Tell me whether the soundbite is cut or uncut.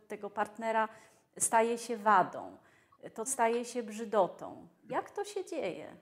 cut